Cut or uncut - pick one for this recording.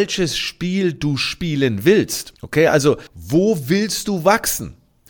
cut